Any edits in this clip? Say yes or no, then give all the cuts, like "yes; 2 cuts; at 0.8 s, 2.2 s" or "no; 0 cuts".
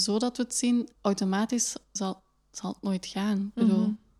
yes; 1 cut; at 1.0 s